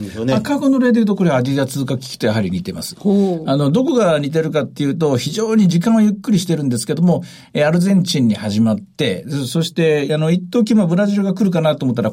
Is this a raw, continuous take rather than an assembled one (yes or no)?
no